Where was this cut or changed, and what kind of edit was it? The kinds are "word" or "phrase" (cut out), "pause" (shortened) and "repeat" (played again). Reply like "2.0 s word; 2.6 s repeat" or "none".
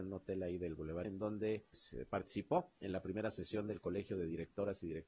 1.0 s word; 1.7 s word